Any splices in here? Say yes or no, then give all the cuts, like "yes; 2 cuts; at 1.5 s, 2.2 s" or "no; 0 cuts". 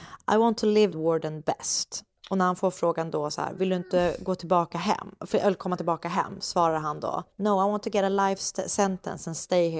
yes; 2 cuts; at 0.9 s, 7.3 s